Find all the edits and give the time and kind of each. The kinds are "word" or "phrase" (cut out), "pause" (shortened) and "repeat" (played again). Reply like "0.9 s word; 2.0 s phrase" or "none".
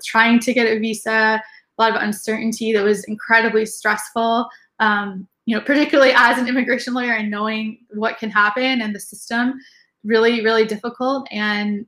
none